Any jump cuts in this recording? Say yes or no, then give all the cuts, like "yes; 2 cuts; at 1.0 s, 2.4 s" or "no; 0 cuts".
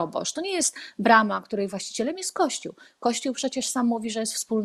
no; 0 cuts